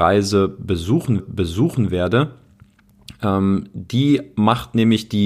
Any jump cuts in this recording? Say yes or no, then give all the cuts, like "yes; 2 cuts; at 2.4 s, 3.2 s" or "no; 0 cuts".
yes; 1 cut; at 1.2 s